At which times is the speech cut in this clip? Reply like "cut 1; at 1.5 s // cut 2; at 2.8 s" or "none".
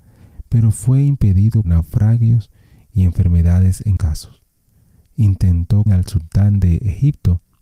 cut 1; at 1.6 s // cut 2; at 4.0 s // cut 3; at 5.9 s